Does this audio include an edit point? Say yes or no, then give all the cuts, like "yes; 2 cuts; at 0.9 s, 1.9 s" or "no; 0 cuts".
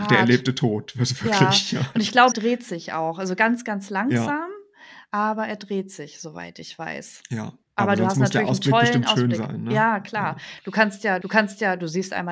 yes; 3 cuts; at 2.3 s, 7.6 s, 11.2 s